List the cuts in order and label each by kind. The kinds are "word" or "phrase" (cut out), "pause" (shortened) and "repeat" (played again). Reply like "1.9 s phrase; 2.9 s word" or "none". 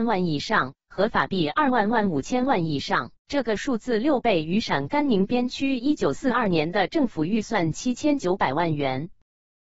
3.2 s pause